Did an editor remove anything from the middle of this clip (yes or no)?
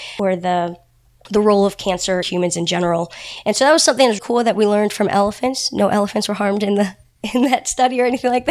yes